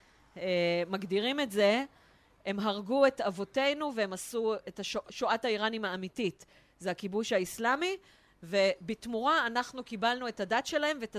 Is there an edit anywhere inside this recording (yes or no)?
no